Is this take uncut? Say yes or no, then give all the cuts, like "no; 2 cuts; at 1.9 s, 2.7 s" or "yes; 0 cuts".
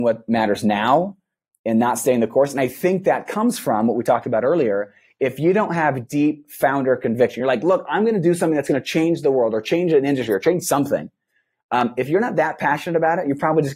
yes; 0 cuts